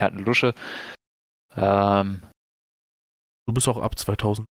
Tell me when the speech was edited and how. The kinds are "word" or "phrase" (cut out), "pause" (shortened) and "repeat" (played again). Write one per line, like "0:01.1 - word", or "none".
none

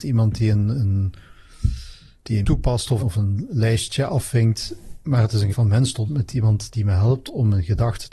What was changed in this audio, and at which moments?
0:02.4 - word
0:03.0 - word
0:05.5 - word
0:06.1 - word

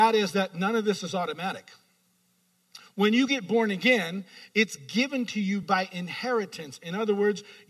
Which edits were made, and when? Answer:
none

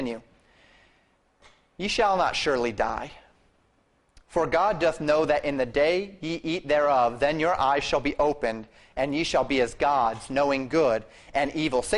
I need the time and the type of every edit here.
none

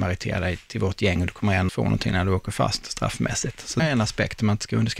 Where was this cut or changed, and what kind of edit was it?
0:01.7 - word
0:03.8 - phrase

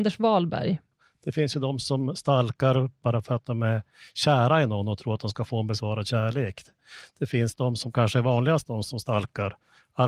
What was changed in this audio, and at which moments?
none

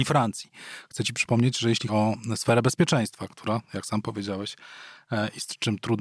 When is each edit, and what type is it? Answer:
0:01.9 - word

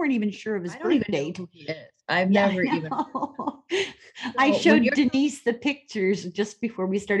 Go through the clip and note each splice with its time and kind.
none

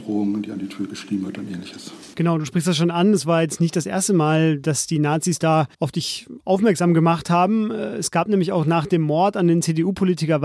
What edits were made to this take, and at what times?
0:05.7 - pause

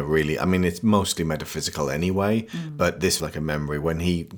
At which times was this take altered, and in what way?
0:03.2 - word

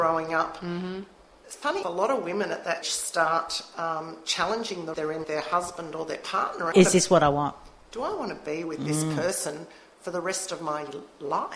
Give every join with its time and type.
0:01.8 - word
0:02.8 - word
0:04.9 - word
0:05.2 - word
0:06.7 - phrase

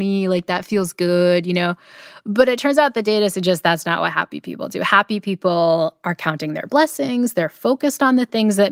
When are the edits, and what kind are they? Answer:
none

